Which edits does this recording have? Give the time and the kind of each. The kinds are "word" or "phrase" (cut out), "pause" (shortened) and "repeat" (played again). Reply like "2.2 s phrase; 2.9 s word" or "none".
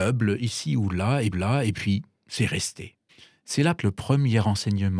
1.3 s repeat; 3.1 s pause; 3.8 s word